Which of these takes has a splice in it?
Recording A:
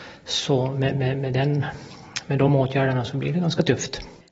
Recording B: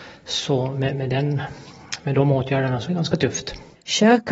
B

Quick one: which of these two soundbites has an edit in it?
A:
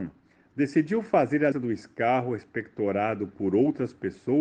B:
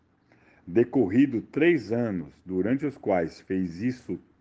A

